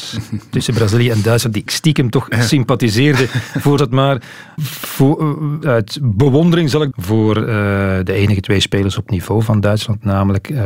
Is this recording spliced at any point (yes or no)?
yes